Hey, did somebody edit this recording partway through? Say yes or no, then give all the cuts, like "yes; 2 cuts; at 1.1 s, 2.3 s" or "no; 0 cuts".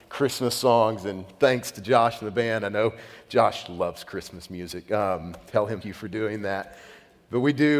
yes; 1 cut; at 5.8 s